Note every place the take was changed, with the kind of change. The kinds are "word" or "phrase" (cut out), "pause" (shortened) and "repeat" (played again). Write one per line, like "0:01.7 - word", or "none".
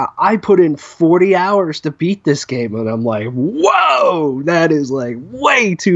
none